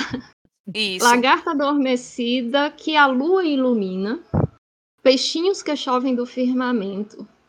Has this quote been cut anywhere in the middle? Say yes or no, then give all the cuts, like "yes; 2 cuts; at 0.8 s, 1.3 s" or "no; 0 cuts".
no; 0 cuts